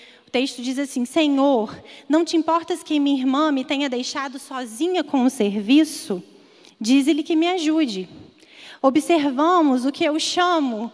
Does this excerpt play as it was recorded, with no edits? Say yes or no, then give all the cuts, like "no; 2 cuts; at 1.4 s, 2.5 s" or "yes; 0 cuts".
yes; 0 cuts